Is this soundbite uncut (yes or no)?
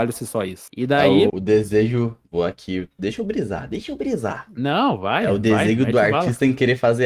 no